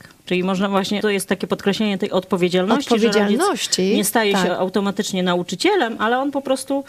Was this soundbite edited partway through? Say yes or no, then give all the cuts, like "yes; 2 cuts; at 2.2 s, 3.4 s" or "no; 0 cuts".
yes; 1 cut; at 1.0 s